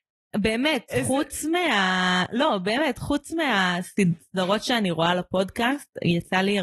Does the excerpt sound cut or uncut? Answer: uncut